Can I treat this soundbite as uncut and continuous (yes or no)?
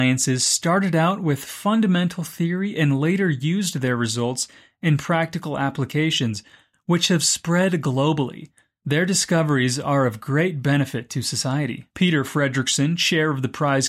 yes